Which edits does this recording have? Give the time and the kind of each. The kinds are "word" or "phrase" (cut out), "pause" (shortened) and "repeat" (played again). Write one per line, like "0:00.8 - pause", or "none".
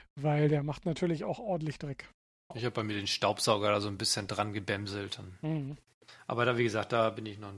none